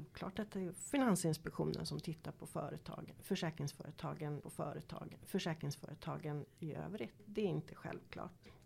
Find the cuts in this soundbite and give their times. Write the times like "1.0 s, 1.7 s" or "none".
4.4 s